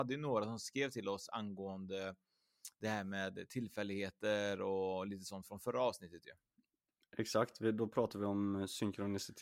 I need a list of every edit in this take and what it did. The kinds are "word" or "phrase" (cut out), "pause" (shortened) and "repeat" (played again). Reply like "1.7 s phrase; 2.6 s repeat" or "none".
none